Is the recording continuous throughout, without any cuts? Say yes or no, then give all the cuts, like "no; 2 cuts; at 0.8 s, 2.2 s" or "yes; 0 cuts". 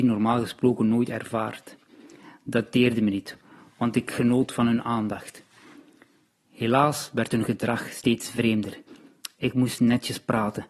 yes; 0 cuts